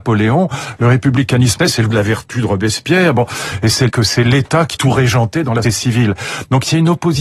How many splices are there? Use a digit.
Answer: 5